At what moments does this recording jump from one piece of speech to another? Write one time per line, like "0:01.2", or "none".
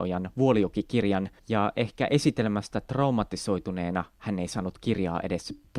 0:01.4